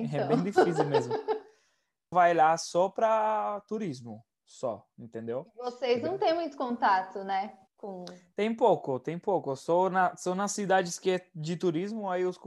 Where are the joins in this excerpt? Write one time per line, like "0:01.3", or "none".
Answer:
0:02.1
0:04.3
0:07.7